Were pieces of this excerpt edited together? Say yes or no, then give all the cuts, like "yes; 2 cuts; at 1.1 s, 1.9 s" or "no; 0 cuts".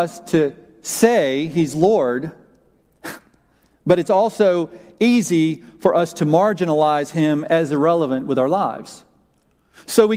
no; 0 cuts